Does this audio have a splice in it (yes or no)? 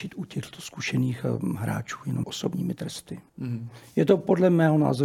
yes